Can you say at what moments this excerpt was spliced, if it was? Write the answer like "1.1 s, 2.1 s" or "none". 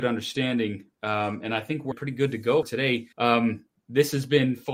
1.9 s, 2.6 s, 3.1 s